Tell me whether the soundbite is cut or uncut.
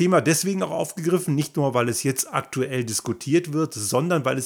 uncut